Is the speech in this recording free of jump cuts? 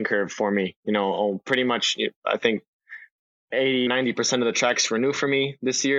no; 1 cut; at 3.9 s

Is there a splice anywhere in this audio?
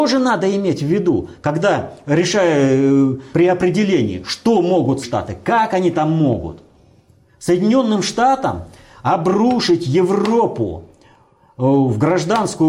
yes; 2 cuts; at 3.3 s, 5.0 s

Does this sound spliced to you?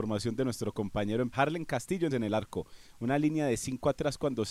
yes; 2 cuts; at 1.3 s, 2.1 s

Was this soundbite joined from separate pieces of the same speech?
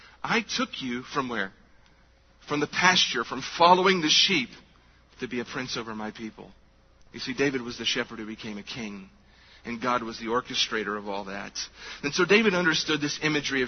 no; 0 cuts

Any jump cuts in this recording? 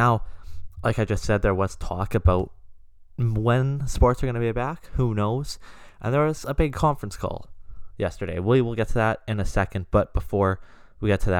no; 0 cuts

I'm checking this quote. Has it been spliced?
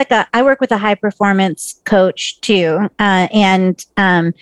no; 0 cuts

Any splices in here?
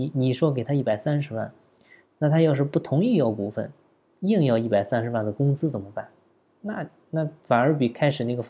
no; 0 cuts

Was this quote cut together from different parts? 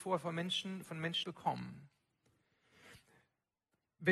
yes; 1 cut; at 1.2 s

